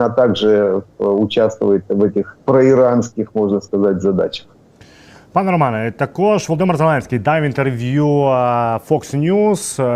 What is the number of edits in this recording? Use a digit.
1